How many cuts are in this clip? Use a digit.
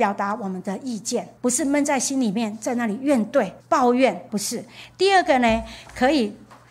3